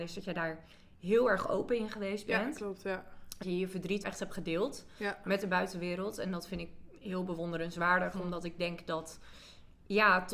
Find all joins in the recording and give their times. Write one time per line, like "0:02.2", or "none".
0:03.4
0:04.0